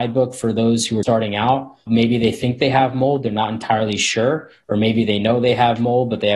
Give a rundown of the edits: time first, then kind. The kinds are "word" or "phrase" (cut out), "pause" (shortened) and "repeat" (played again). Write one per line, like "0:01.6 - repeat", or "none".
0:01.0 - word
0:01.9 - word